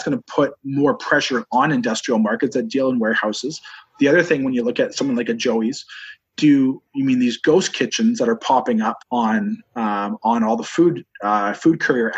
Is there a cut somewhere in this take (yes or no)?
yes